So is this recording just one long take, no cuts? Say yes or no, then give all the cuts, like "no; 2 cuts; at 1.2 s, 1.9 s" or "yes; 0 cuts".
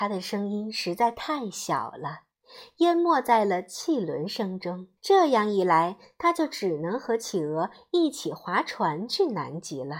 no; 1 cut; at 5.0 s